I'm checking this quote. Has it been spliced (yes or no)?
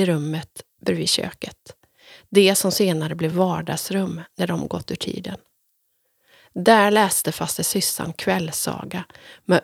no